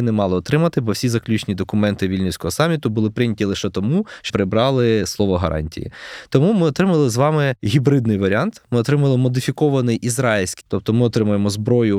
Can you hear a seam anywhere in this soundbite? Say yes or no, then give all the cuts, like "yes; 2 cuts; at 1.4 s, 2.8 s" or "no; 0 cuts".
yes; 2 cuts; at 4.3 s, 10.6 s